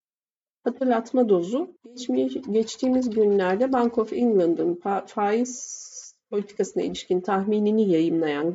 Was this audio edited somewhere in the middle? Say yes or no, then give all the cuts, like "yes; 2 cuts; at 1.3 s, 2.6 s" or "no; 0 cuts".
yes; 1 cut; at 1.8 s